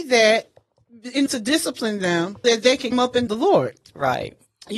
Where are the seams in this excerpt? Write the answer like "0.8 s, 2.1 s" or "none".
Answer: 1.3 s, 2.4 s, 2.9 s, 3.3 s